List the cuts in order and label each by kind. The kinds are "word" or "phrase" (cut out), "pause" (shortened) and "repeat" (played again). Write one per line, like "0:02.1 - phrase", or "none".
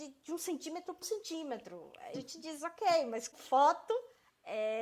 0:01.0 - word
0:02.1 - word
0:03.3 - word